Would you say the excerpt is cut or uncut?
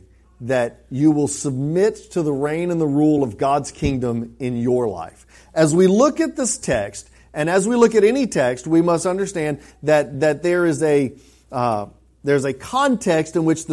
uncut